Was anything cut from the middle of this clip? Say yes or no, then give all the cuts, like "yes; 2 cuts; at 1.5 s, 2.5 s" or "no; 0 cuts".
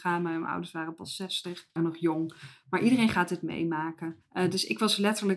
yes; 1 cut; at 1.8 s